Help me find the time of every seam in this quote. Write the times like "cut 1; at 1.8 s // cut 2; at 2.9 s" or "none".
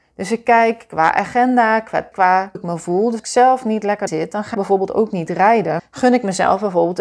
cut 1; at 2.1 s // cut 2; at 2.5 s // cut 3; at 3.2 s // cut 4; at 4.1 s // cut 5; at 4.5 s // cut 6; at 5.8 s